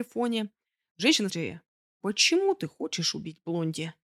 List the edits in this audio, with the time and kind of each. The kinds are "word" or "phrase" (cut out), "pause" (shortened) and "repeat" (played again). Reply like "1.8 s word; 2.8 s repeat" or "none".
1.3 s word